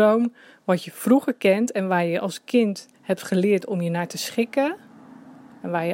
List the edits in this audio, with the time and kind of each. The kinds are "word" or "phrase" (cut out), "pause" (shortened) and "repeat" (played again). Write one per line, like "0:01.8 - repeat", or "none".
0:02.9 - pause